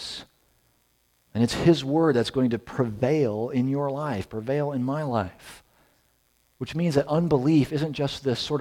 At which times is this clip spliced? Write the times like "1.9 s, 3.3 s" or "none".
none